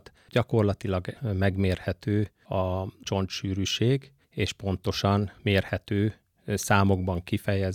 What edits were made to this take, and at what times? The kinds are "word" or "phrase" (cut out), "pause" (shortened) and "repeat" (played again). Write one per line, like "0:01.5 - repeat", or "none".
0:01.1 - word
0:05.4 - pause